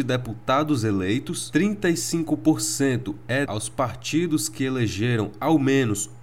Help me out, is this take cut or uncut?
cut